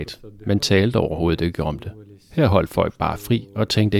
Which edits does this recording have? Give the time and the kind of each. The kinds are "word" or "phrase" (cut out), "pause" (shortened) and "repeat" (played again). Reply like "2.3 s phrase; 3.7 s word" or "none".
none